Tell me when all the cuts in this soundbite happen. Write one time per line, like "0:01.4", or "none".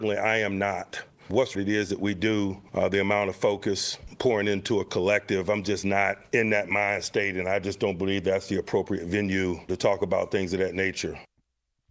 0:01.5